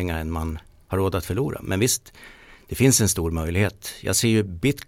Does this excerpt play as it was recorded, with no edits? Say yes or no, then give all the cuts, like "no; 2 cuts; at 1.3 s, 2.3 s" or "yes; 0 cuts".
yes; 0 cuts